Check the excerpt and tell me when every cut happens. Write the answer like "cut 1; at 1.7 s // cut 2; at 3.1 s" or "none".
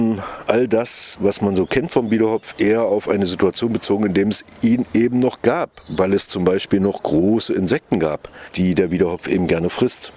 none